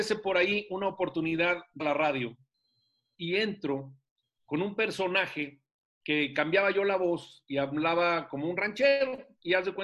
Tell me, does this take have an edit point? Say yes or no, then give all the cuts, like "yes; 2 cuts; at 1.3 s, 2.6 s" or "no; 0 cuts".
yes; 1 cut; at 1.8 s